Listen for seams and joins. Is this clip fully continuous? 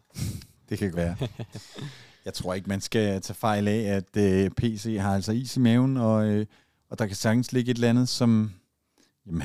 no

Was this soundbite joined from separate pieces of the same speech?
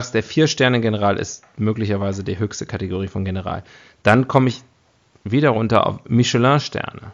no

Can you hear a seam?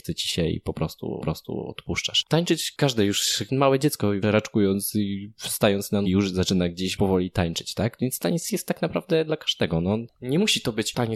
yes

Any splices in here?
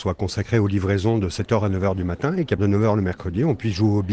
yes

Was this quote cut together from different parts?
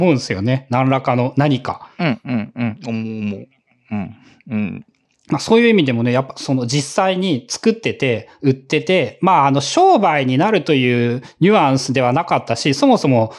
no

